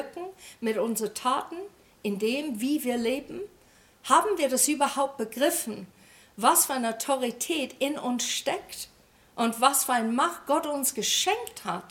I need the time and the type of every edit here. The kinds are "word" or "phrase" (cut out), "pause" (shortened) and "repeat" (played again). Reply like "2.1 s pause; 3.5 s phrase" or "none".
none